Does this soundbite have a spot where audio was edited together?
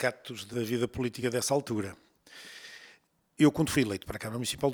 no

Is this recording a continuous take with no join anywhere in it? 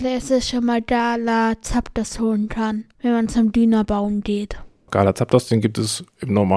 yes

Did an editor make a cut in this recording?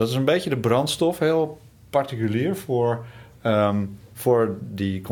no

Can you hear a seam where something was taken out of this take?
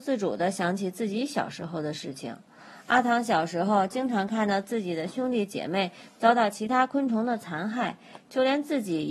no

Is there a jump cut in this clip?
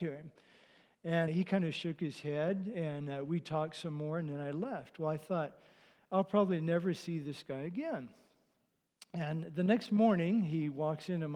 yes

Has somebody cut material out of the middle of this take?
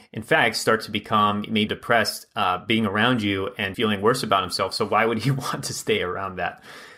yes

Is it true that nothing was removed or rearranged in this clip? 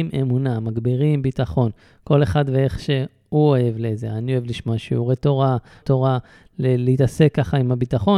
no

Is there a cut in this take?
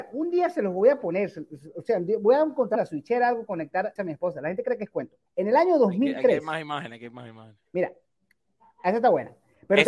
yes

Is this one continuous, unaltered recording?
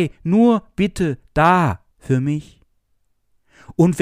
no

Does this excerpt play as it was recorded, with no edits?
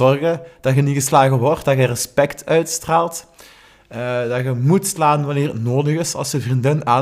yes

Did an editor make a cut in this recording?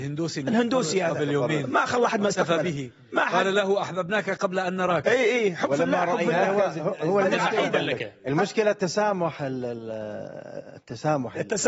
no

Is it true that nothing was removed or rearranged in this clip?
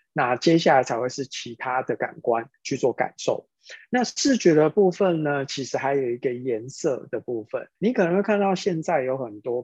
no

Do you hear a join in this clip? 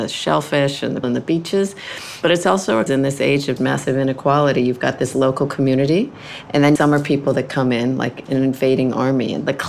yes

